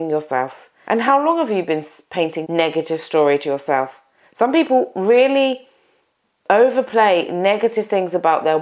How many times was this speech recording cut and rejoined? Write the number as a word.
one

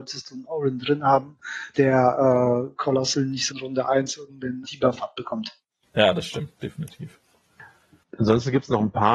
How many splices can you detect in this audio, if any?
three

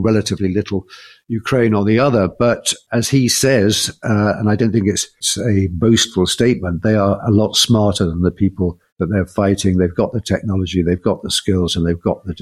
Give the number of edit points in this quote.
one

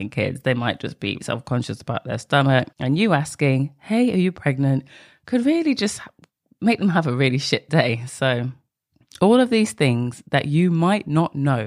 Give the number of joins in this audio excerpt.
three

